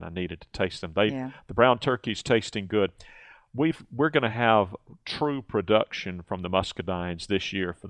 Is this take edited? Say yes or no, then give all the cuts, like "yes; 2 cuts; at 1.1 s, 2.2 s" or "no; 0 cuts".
no; 0 cuts